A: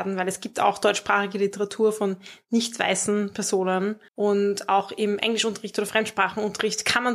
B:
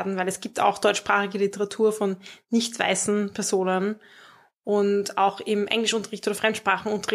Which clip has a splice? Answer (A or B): A